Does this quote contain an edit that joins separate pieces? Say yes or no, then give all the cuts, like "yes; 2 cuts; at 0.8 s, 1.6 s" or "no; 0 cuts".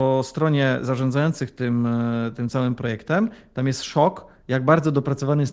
no; 0 cuts